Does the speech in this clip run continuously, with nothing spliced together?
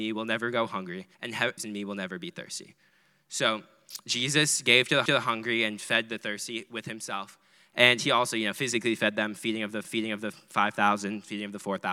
no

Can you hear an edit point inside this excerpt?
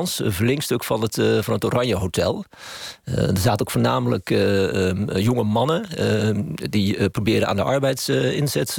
no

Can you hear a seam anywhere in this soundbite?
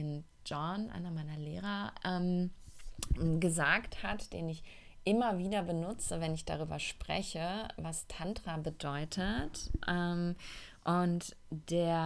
no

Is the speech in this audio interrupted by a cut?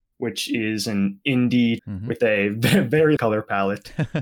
yes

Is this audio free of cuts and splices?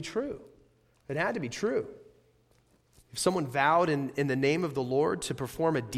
yes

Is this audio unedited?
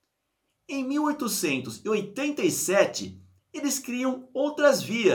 no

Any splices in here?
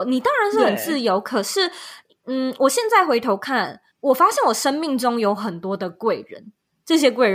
no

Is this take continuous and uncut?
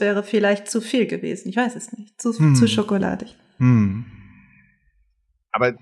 yes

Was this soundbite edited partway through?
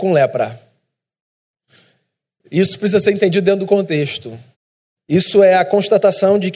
yes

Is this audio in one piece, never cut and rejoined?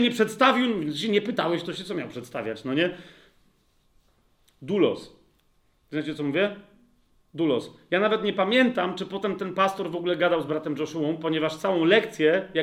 yes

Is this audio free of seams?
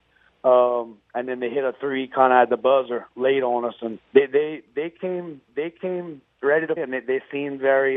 no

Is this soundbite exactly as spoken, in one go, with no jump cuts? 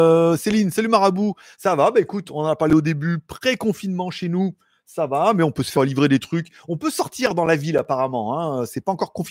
no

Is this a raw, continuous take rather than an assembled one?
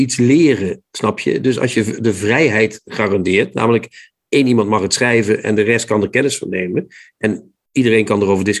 yes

